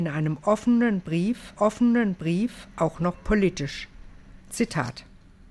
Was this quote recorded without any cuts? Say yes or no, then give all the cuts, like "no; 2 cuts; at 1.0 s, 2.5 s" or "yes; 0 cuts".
no; 2 cuts; at 1.5 s, 4.4 s